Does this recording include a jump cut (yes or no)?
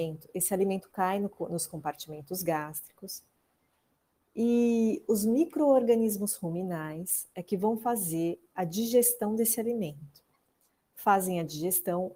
no